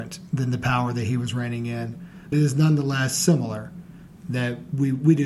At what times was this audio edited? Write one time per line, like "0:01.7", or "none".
0:02.3